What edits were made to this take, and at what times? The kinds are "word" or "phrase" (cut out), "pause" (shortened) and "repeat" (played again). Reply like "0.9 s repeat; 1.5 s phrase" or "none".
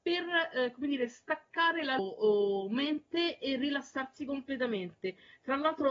2.0 s word